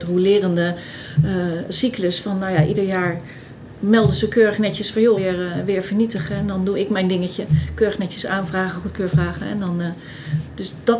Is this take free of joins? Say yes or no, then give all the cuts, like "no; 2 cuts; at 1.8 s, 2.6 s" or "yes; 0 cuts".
no; 1 cut; at 5.2 s